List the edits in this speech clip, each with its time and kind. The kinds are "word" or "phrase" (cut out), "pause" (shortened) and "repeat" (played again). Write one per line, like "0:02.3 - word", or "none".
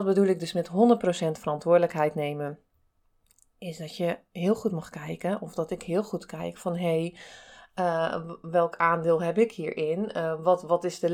none